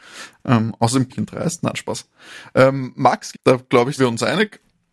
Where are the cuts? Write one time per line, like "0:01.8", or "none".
0:01.1
0:03.3
0:04.0